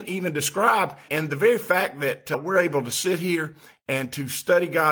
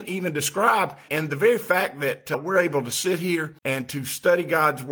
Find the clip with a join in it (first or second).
second